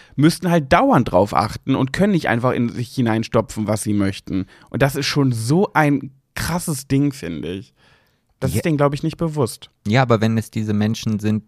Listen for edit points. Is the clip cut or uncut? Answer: uncut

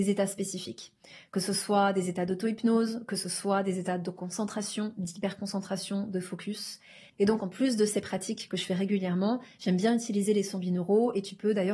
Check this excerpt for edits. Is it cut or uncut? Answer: uncut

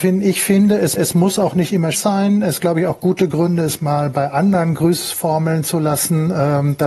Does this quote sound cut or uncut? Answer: cut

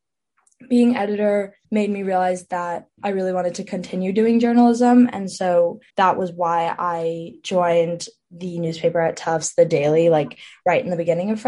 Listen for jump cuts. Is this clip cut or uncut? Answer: cut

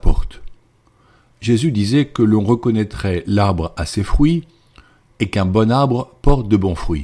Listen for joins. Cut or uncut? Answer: uncut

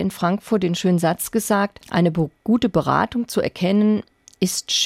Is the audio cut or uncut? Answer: cut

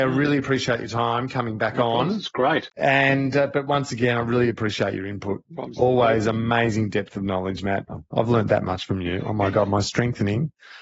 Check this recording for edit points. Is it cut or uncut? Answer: cut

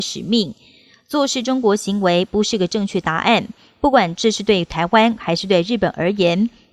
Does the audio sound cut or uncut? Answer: uncut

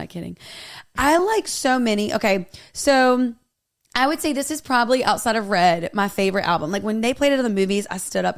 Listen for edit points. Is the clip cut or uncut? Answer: uncut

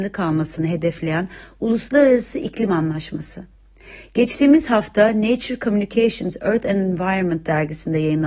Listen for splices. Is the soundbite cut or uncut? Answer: uncut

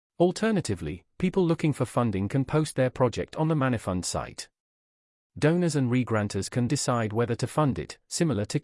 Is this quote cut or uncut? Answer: cut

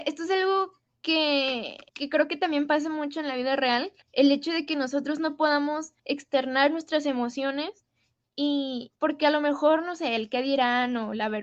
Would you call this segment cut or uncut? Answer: cut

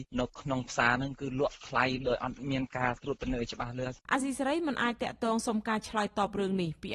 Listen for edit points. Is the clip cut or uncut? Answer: cut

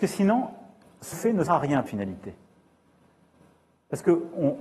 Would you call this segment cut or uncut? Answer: cut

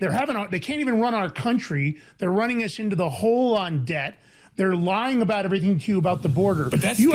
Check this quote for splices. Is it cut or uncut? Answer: uncut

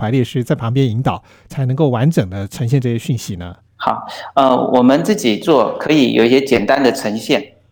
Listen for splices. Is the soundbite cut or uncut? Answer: cut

